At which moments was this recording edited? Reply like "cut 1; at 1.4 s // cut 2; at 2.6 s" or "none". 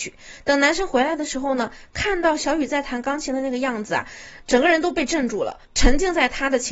cut 1; at 5.7 s